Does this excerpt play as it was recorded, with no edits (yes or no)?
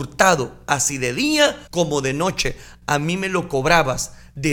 no